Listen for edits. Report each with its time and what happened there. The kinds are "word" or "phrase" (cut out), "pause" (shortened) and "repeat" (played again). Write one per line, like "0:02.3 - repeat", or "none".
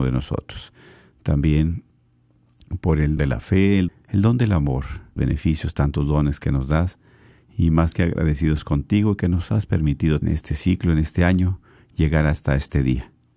0:03.2 - word
0:03.9 - phrase
0:05.2 - word
0:10.2 - phrase